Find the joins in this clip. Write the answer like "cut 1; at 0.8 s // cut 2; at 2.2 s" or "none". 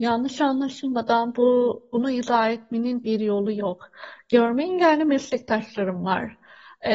none